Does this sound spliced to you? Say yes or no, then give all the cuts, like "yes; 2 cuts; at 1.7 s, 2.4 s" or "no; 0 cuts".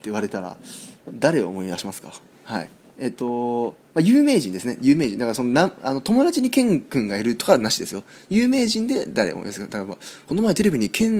no; 0 cuts